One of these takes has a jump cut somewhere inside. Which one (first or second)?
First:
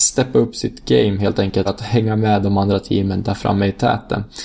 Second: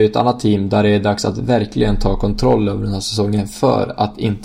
first